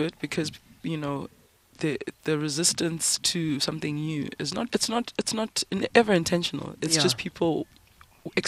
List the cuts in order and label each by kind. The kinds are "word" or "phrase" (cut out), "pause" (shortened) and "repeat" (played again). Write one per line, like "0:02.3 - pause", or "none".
0:04.7 - word